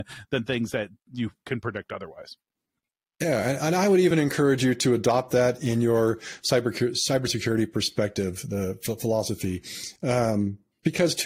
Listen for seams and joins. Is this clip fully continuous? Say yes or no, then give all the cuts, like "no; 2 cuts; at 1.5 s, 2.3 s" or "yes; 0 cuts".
yes; 0 cuts